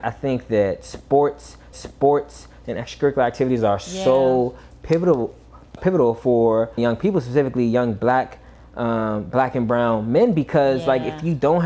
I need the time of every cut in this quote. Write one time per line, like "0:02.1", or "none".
0:01.7
0:05.8
0:06.8